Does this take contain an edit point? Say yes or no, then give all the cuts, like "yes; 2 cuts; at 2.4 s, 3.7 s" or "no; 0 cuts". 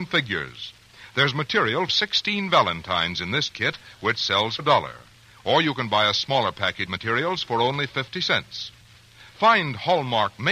yes; 3 cuts; at 1.9 s, 4.6 s, 6.9 s